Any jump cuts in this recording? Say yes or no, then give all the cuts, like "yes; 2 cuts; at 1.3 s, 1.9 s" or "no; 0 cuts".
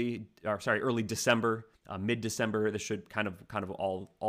yes; 1 cut; at 1.8 s